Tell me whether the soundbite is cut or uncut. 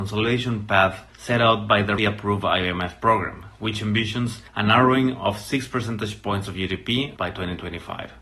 cut